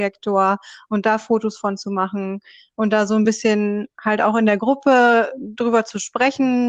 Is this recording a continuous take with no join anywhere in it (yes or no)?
yes